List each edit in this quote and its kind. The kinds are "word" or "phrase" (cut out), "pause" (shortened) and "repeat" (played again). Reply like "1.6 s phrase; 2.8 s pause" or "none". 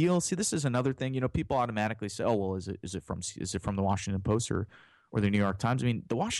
none